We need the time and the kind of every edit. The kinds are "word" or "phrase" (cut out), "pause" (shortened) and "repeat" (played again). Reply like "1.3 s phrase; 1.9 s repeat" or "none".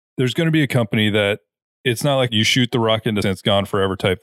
2.3 s word; 3.2 s word